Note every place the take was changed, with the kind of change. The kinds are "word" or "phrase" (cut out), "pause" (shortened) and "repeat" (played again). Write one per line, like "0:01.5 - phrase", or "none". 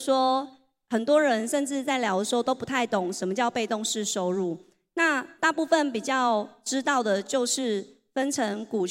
none